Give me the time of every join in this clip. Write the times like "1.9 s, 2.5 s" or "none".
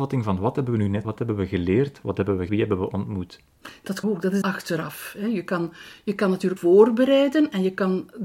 1.0 s, 2.5 s, 4.0 s, 4.4 s, 6.6 s